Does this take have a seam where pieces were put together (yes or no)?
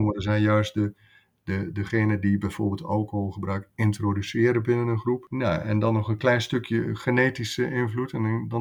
no